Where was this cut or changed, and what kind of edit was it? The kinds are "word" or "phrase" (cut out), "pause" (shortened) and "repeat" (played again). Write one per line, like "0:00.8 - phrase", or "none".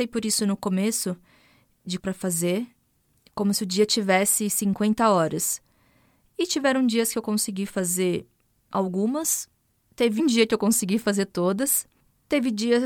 0:02.0 - phrase
0:10.2 - word